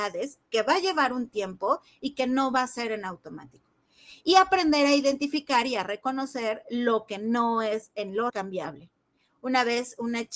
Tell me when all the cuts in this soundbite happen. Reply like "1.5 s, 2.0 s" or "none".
8.3 s